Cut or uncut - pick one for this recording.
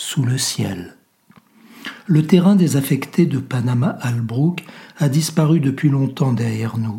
uncut